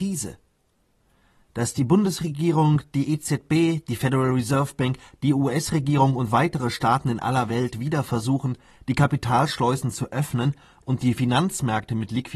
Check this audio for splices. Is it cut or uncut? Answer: uncut